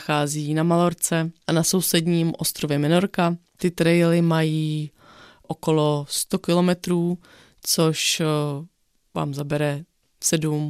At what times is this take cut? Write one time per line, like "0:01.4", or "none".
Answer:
none

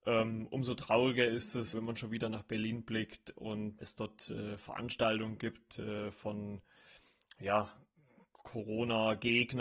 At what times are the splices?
0:01.7
0:03.8

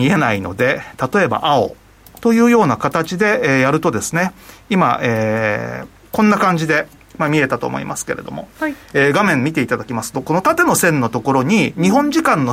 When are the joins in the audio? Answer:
none

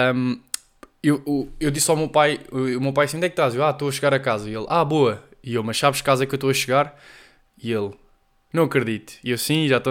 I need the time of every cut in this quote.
none

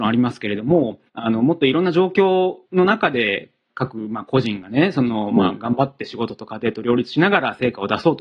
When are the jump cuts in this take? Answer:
0:01.1
0:02.7

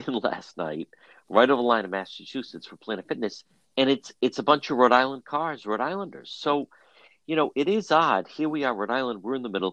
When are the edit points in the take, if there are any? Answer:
none

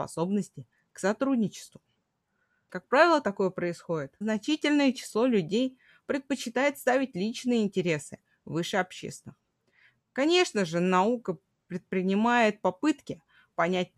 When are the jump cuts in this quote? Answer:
0:04.2

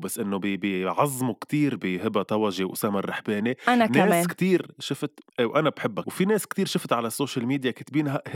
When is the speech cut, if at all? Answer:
0:05.3
0:06.0

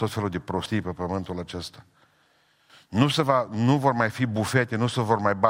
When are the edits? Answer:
none

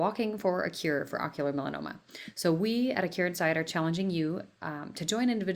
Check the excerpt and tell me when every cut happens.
none

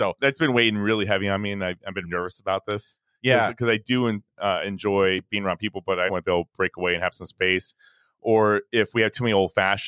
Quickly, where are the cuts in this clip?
0:02.0
0:06.1

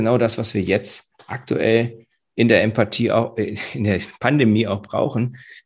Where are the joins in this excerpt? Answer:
none

